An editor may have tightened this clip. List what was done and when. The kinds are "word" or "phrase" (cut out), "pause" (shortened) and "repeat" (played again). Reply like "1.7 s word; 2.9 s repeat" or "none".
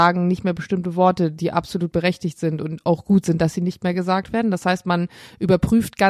none